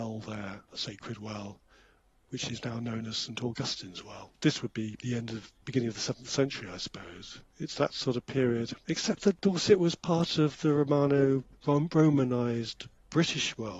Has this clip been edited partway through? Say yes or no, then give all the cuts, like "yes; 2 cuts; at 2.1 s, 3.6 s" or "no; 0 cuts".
yes; 1 cut; at 5.6 s